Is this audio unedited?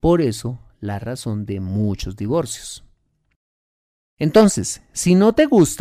yes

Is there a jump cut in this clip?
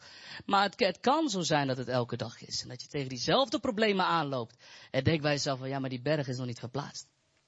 no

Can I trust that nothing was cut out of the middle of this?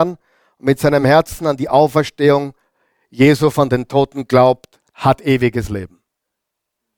yes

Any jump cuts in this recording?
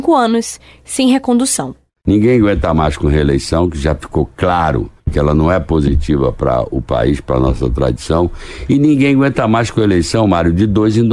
yes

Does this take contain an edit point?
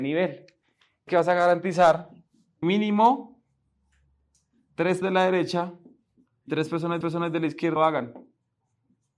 yes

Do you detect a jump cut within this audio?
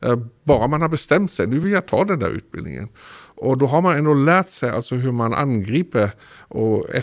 no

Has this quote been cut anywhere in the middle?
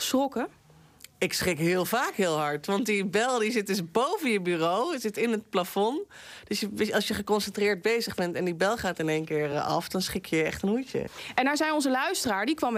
no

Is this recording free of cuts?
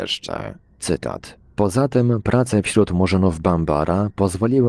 yes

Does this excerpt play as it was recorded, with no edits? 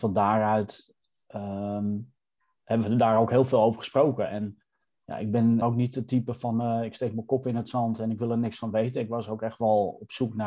no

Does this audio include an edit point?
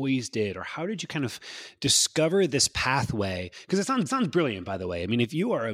yes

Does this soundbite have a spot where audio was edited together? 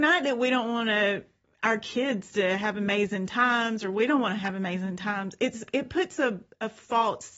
no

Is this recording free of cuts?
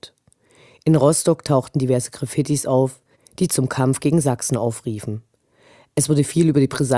yes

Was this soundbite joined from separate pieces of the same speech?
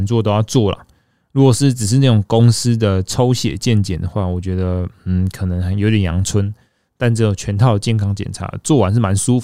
no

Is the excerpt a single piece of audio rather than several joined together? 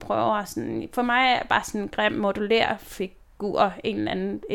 yes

